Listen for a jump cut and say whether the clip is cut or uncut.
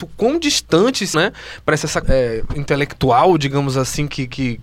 cut